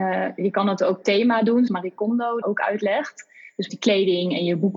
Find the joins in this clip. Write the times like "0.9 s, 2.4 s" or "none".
1.0 s, 1.7 s, 2.4 s, 3.7 s